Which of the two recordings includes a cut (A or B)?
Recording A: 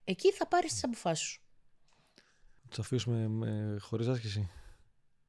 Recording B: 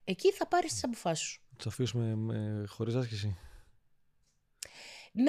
B